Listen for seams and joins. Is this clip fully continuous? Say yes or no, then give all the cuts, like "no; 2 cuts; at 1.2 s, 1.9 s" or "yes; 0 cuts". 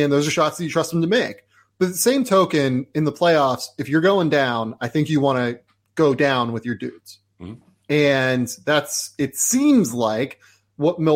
yes; 0 cuts